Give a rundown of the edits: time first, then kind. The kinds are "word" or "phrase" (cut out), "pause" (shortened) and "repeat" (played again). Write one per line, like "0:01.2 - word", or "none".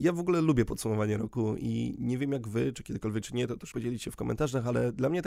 0:03.2 - word
0:03.7 - word